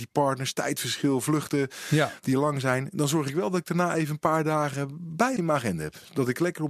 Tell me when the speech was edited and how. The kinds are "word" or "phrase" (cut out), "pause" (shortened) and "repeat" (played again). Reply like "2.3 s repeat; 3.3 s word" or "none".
5.4 s word